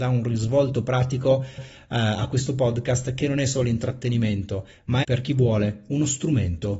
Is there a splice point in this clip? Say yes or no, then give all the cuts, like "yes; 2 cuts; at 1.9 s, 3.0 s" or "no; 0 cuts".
yes; 2 cuts; at 1.6 s, 5.0 s